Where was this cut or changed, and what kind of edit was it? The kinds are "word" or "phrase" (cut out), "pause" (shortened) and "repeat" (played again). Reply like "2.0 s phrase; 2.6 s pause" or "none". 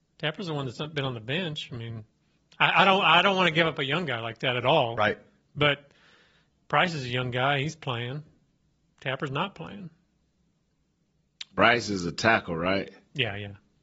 none